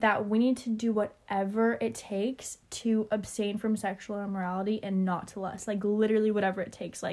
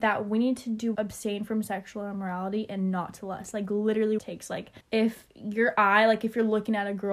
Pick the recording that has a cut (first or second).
second